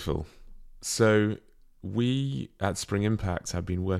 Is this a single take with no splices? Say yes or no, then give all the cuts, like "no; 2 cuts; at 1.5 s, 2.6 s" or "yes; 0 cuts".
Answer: yes; 0 cuts